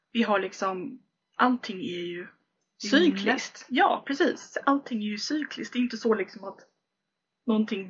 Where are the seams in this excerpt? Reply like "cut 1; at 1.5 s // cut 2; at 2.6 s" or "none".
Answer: none